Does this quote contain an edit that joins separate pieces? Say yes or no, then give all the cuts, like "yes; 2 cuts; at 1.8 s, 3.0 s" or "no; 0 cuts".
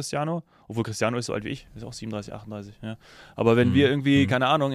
yes; 1 cut; at 1.3 s